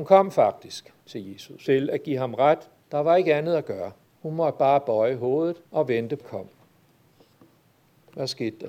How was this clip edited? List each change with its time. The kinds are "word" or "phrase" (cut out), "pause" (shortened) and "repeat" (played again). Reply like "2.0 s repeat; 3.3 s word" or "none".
1.0 s pause; 1.7 s phrase; 2.8 s pause; 4.0 s pause; 5.7 s pause; 6.2 s phrase